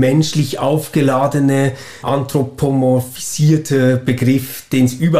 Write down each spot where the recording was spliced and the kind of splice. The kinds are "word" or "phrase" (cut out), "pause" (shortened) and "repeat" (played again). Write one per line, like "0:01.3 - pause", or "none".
0:02.0 - word